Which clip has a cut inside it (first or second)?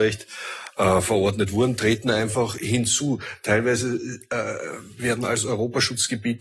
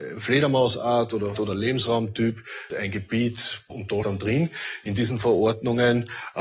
second